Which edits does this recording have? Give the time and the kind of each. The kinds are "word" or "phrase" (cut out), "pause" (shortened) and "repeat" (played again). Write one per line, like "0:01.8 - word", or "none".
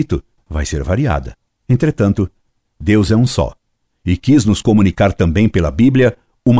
none